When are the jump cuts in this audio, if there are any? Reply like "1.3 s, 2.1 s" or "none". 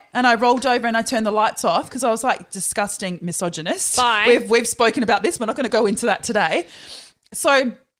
none